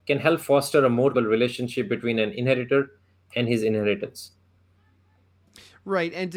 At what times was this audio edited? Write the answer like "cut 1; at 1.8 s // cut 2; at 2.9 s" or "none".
cut 1; at 1.1 s